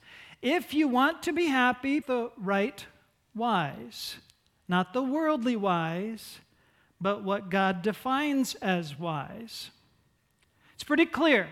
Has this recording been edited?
yes; 1 cut; at 2.0 s

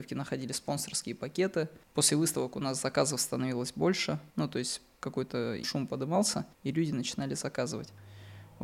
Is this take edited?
yes; 4 cuts; at 1.8 s, 4.3 s, 5.6 s, 6.5 s

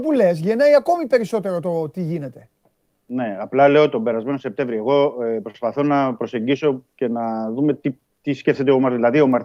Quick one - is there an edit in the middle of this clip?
no; 0 cuts

